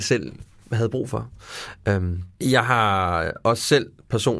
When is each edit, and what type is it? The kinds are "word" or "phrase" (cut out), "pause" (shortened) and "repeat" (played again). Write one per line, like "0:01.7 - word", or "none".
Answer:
0:02.3 - pause